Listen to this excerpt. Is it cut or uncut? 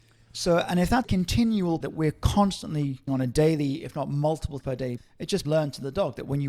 cut